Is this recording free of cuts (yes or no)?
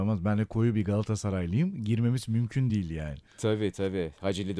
yes